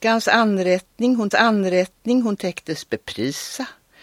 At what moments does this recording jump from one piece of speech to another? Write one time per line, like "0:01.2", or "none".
0:01.3

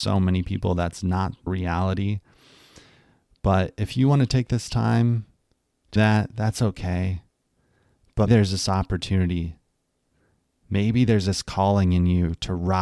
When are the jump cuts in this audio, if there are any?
0:01.5
0:06.0
0:08.3

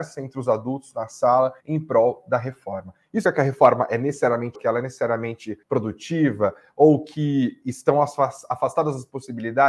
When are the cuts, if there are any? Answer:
0:01.6
0:03.2
0:04.5
0:05.6

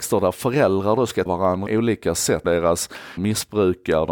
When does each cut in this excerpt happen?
0:01.3
0:01.7
0:02.4
0:03.2

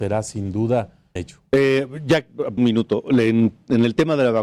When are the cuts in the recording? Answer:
0:01.2
0:02.6

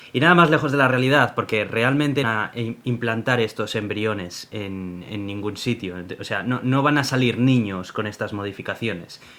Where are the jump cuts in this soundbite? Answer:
0:02.2

